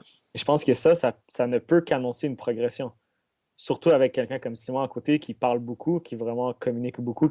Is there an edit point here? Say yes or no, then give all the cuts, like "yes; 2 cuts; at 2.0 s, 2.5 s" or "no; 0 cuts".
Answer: no; 0 cuts